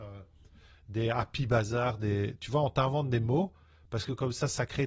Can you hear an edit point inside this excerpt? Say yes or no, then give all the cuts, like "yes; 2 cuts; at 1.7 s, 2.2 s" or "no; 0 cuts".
no; 0 cuts